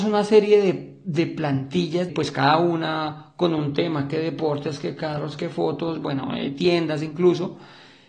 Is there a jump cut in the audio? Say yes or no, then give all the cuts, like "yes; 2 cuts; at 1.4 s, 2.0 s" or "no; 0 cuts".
yes; 1 cut; at 2.1 s